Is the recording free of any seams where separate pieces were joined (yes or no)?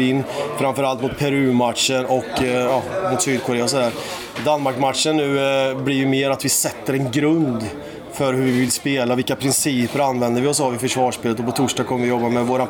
yes